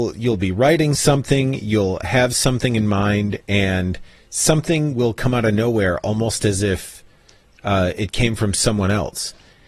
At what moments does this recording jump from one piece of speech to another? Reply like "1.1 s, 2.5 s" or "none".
none